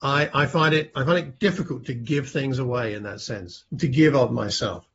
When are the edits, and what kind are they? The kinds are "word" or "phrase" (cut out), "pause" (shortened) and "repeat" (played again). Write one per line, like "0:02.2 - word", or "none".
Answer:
0:03.7 - pause